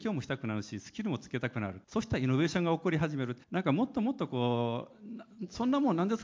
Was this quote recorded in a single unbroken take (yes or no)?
no